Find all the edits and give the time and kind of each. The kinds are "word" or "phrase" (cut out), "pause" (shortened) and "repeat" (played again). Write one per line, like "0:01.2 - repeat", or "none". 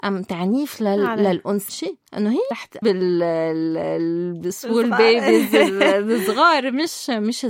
0:01.7 - phrase
0:02.1 - pause
0:02.5 - word
0:02.8 - phrase